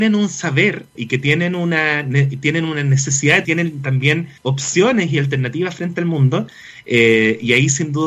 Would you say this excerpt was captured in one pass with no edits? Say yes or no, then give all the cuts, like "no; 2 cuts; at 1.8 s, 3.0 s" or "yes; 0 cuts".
no; 3 cuts; at 0.9 s, 3.4 s, 4.4 s